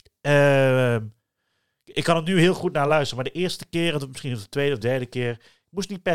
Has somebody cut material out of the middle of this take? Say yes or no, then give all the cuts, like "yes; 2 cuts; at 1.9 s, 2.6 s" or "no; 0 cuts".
no; 0 cuts